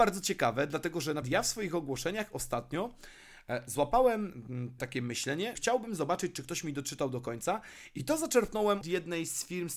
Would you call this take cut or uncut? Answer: cut